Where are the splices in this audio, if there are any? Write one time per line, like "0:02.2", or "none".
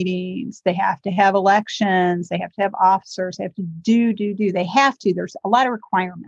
none